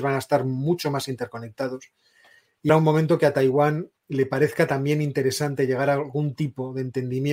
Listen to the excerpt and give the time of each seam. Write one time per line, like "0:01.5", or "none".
0:02.7